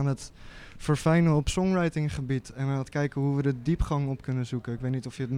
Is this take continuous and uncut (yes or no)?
yes